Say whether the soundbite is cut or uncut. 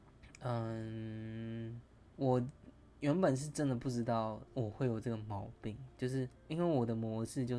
cut